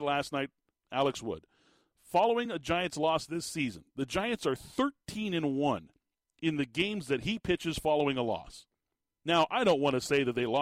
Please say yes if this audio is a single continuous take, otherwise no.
yes